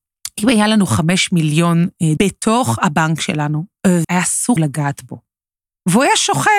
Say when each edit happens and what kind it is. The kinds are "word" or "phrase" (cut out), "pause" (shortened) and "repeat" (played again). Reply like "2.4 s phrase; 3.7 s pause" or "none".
2.2 s word; 4.0 s word; 4.6 s word